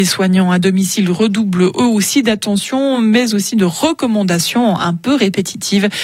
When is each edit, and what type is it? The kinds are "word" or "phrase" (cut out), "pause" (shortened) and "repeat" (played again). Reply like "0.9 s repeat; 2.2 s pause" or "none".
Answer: none